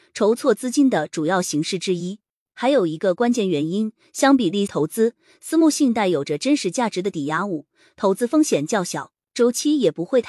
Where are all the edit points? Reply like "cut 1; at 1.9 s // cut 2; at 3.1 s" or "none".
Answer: cut 1; at 4.7 s

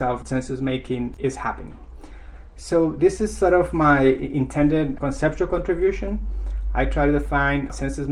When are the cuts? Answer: none

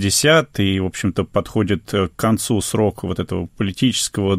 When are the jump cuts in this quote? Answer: none

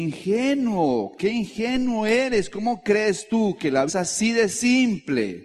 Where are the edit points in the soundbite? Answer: cut 1; at 3.9 s

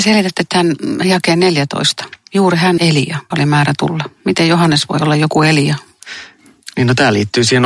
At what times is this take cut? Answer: cut 1; at 2.8 s // cut 2; at 3.3 s

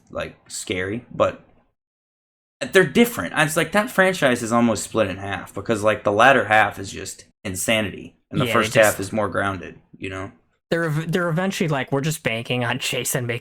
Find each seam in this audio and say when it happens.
cut 1; at 7.3 s

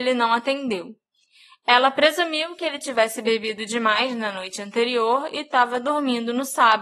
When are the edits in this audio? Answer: none

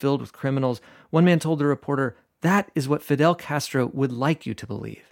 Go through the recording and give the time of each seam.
none

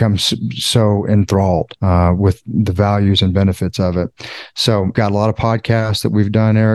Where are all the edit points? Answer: cut 1; at 1.8 s // cut 2; at 4.9 s

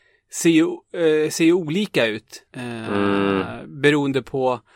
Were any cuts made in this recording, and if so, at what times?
cut 1; at 2.5 s

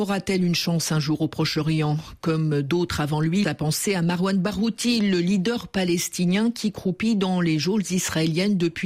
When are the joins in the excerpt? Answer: cut 1; at 3.4 s

